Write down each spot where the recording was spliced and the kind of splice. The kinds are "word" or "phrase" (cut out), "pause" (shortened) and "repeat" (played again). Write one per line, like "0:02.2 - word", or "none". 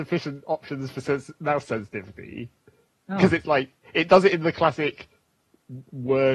none